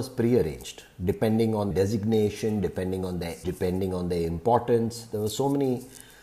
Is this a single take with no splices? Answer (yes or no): no